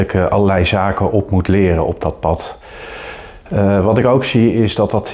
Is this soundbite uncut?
yes; 0 cuts

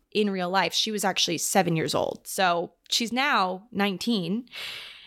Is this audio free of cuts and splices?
yes; 0 cuts

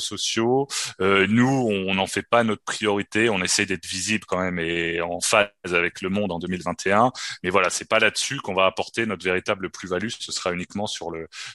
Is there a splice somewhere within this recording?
no; 0 cuts

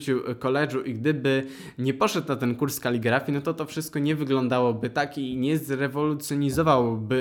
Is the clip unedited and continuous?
yes; 0 cuts

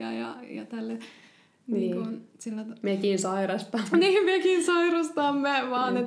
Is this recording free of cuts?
yes; 0 cuts

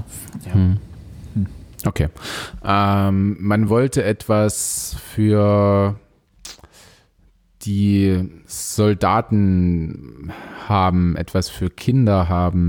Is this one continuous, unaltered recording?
yes; 0 cuts

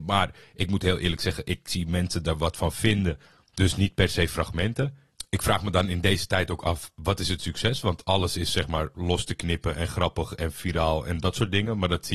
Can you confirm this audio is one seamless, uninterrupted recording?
yes; 0 cuts

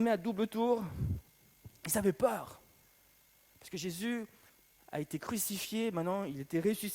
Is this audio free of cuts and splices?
yes; 0 cuts

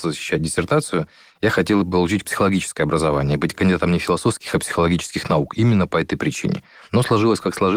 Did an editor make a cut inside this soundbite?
no; 0 cuts

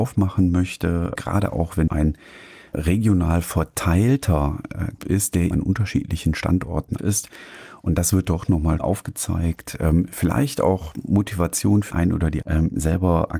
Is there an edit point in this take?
yes; 9 cuts; at 1.2 s, 1.9 s, 2.7 s, 5.0 s, 5.5 s, 7.0 s, 8.8 s, 11.9 s, 12.4 s

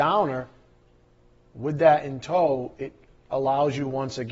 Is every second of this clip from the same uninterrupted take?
yes; 0 cuts

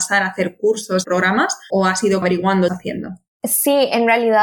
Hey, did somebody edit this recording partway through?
yes; 4 cuts; at 1.0 s, 1.7 s, 2.2 s, 2.7 s

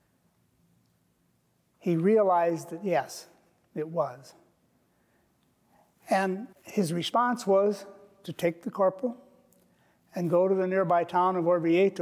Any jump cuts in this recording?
yes; 1 cut; at 6.5 s

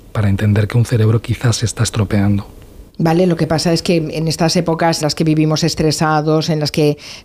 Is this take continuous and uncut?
no; 2 cuts; at 2.9 s, 5.0 s

